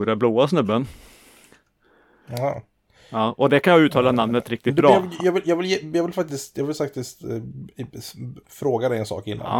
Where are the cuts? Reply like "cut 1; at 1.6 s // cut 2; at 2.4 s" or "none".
none